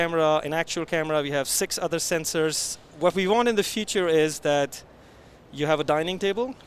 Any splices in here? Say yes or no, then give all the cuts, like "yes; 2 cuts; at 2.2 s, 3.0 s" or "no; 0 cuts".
no; 0 cuts